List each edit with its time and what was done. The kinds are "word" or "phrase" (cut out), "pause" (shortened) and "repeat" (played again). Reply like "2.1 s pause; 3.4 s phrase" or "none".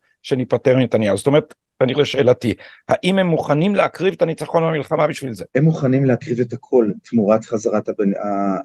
1.9 s word; 5.5 s pause